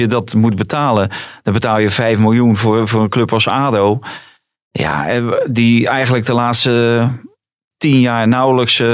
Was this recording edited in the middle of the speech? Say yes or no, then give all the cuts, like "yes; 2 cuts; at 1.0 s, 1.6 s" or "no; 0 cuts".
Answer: no; 0 cuts